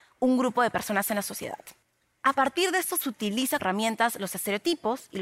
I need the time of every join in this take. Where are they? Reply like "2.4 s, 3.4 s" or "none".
1.8 s, 3.0 s, 3.6 s